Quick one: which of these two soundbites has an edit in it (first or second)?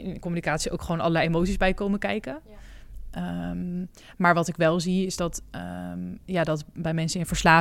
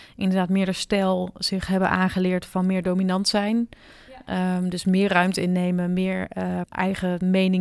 second